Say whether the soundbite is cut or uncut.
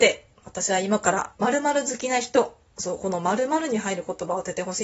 cut